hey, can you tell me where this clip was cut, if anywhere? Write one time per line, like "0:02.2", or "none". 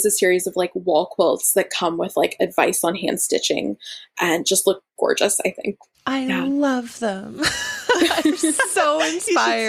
none